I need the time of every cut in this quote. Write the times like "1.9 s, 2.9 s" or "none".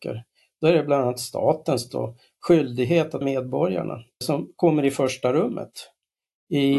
3.2 s, 4.2 s